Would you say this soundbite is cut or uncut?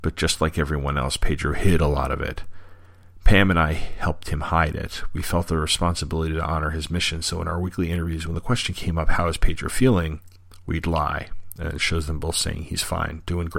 uncut